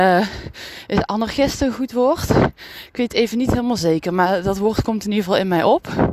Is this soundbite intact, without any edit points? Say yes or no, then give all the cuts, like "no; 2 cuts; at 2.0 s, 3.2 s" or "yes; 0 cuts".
yes; 0 cuts